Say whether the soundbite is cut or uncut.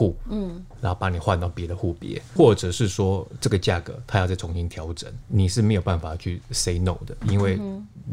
cut